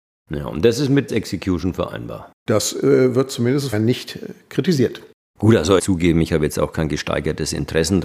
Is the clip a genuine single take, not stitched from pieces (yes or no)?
no